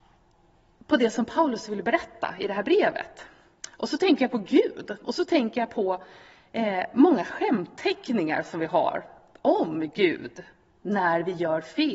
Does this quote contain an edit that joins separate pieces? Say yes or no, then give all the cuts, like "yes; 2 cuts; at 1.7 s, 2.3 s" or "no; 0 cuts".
no; 0 cuts